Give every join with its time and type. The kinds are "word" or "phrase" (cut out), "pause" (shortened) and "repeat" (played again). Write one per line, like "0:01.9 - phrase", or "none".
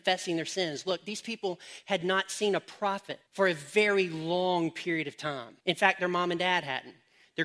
0:03.3 - pause
0:05.6 - pause